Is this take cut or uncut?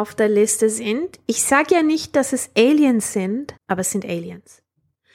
cut